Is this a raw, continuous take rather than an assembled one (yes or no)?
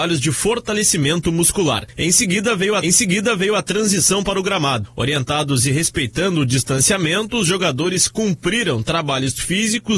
no